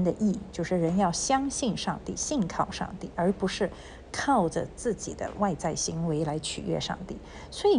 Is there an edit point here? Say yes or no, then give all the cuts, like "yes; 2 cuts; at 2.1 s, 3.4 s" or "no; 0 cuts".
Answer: no; 0 cuts